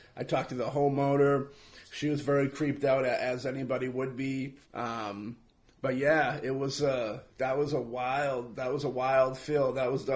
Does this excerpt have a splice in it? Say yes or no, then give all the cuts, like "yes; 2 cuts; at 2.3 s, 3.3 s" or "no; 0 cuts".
yes; 2 cuts; at 4.6 s, 7.3 s